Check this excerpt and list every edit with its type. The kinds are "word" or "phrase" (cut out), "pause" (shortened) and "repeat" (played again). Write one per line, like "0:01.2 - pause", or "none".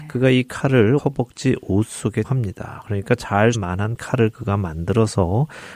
0:01.0 - word
0:02.2 - word
0:03.5 - word